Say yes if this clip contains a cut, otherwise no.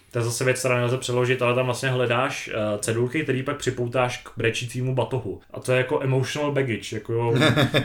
yes